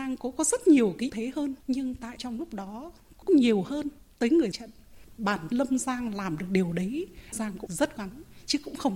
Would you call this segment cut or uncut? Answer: cut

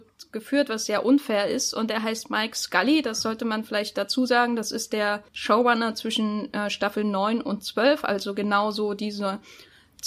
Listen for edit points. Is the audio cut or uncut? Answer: cut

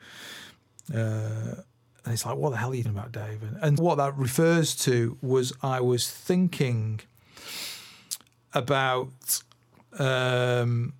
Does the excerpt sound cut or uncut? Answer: cut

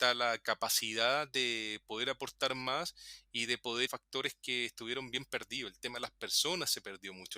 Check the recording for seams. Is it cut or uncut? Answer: cut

